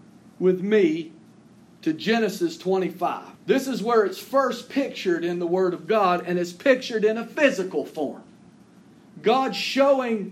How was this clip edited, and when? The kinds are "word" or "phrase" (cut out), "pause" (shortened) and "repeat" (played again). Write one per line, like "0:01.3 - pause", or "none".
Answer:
0:01.6 - pause
0:03.4 - pause